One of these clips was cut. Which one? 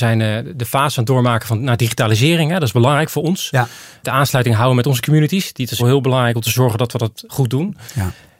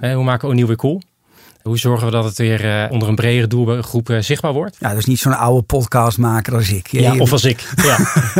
first; 1 cut; at 5.8 s

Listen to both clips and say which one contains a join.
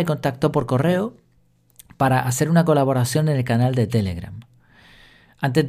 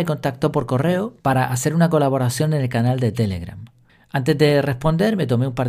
second; 2 cuts; at 1.2 s, 3.9 s

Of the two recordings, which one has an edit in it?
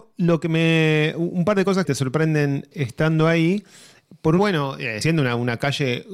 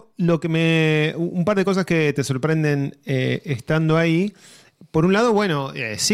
first; 4 cuts; at 1.8 s, 2.7 s, 4.4 s, 5.0 s

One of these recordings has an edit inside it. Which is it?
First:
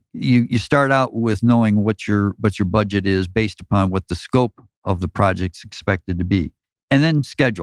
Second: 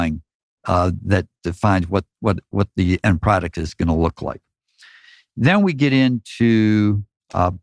first; 1 cut; at 6.6 s

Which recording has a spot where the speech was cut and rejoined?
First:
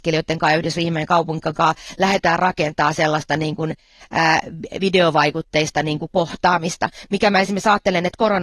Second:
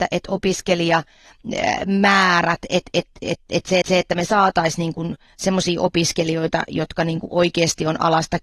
second; 1 cut; at 3.8 s

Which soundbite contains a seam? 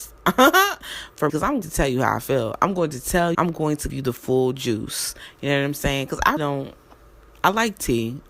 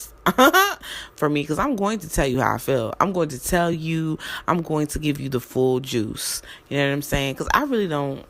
first; 5 cuts; at 1.3 s, 1.6 s, 3.3 s, 3.9 s, 6.4 s

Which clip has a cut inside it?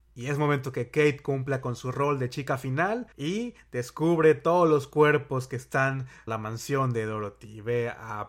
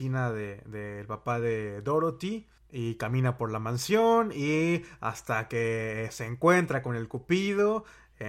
first; 2 cuts; at 3.1 s, 6.3 s

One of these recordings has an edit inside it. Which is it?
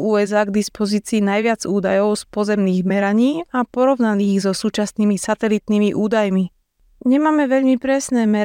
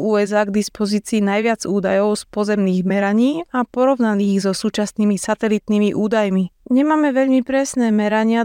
second; 1 cut; at 6.6 s

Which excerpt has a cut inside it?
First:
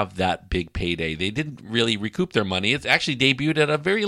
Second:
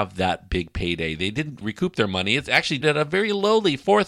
second; 2 cuts; at 1.6 s, 2.8 s

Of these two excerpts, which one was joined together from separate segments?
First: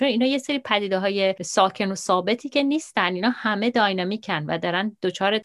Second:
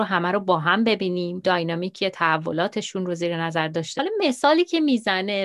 second; 2 cuts; at 1.4 s, 4.0 s

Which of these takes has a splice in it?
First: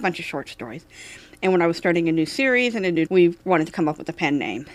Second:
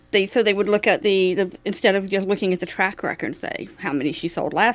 first; 1 cut; at 3.1 s

